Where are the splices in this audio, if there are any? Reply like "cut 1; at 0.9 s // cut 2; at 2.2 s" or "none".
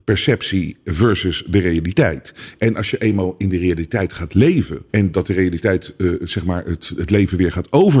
cut 1; at 4.9 s